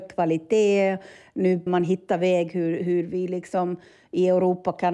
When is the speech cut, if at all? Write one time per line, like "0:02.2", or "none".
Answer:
0:01.7